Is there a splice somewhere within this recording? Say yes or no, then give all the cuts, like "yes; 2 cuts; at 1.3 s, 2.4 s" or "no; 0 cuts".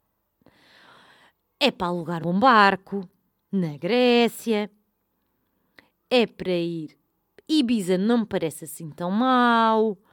yes; 1 cut; at 2.2 s